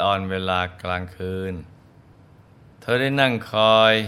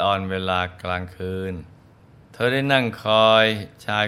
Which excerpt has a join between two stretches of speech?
second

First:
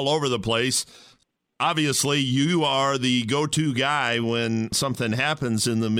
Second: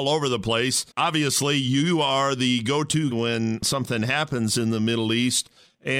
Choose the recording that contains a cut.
second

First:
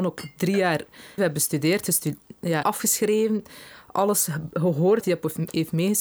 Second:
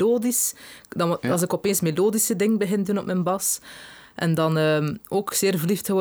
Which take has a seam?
first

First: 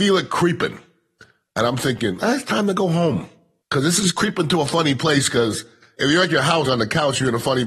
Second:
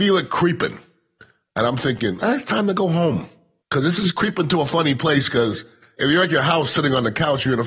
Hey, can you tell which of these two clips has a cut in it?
first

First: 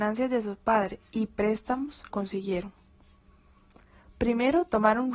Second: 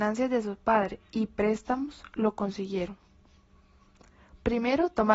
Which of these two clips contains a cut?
first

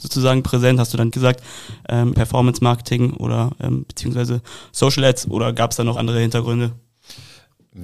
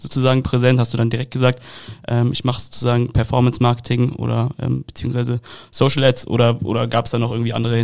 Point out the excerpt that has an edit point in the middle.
first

